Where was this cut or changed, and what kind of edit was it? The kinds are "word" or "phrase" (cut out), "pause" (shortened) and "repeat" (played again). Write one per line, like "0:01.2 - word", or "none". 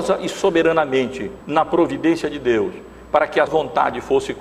0:01.4 - pause
0:03.5 - word